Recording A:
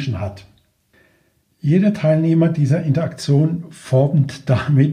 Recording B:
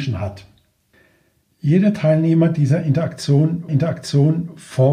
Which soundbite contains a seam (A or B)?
B